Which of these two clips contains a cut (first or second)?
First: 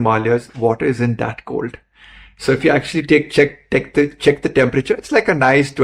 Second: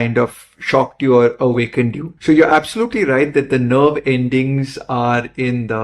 second